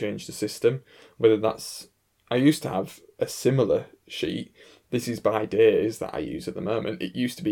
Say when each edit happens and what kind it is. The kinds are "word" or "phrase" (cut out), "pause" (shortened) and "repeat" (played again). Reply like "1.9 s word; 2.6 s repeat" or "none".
none